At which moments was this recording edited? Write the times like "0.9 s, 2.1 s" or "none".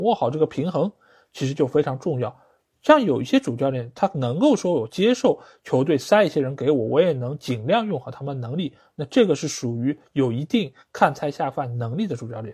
none